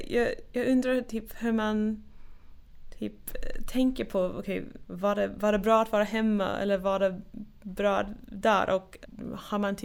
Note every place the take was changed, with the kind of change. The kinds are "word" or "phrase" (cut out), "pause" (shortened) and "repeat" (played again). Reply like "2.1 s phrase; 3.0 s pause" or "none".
none